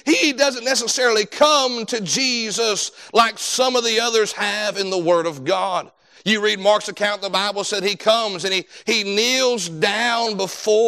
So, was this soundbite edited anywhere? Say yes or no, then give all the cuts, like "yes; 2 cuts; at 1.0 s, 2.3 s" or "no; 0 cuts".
no; 0 cuts